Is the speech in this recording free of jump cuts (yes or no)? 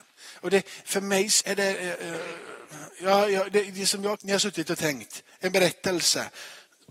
no